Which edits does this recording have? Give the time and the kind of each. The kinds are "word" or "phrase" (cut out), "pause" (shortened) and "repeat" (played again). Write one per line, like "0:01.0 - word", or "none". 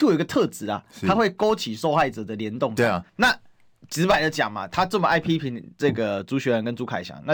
0:03.1 - pause